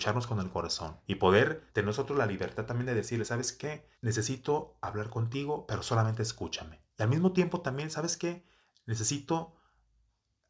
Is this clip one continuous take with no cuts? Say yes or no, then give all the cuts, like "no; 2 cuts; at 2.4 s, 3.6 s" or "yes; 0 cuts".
no; 4 cuts; at 1.0 s, 1.7 s, 3.9 s, 6.9 s